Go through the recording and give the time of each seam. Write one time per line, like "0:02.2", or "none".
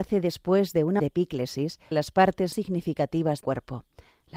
0:01.0
0:01.9
0:02.5
0:03.4